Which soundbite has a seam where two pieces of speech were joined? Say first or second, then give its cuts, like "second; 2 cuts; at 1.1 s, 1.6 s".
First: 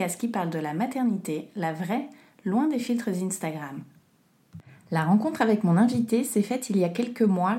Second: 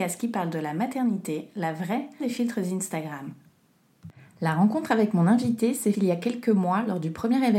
second; 2 cuts; at 2.2 s, 5.9 s